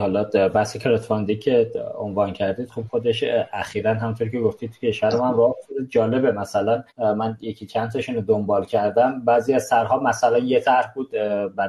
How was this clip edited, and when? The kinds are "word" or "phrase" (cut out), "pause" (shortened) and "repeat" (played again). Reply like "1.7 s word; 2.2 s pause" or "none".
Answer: 6.9 s pause